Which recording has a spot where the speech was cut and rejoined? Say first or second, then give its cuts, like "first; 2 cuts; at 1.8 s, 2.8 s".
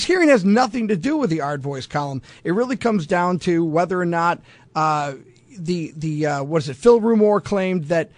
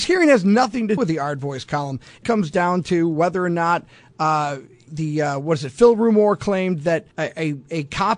second; 4 cuts; at 1.0 s, 2.2 s, 4.9 s, 7.1 s